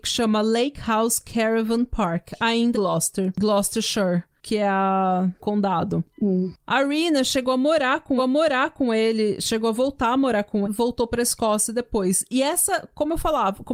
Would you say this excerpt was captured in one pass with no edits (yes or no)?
no